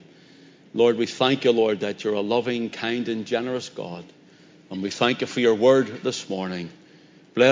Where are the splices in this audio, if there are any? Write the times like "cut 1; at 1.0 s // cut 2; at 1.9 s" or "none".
none